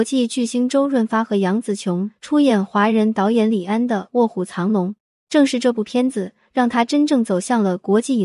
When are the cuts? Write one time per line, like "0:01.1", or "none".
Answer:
0:05.2